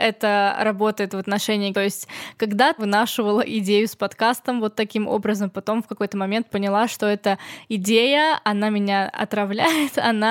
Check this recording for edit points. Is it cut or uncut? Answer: cut